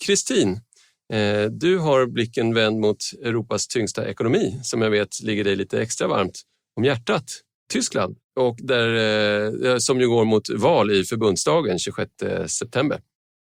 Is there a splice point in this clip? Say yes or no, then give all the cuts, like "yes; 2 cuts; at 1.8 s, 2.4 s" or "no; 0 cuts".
no; 0 cuts